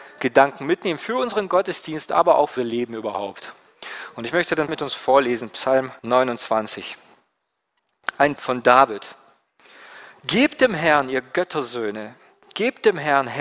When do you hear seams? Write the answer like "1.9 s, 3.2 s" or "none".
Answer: 2.6 s, 4.7 s, 6.0 s, 8.4 s